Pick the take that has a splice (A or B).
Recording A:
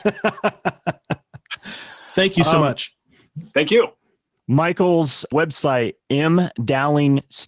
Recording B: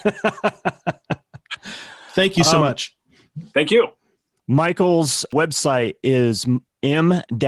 A